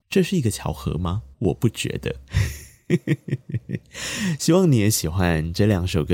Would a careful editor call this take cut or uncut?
cut